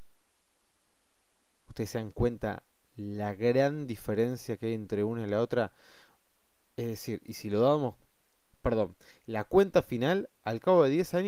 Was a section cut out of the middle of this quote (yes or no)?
yes